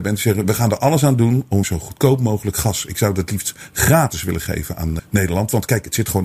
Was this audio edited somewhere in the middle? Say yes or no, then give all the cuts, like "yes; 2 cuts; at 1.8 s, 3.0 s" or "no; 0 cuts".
yes; 2 cuts; at 1.6 s, 5.0 s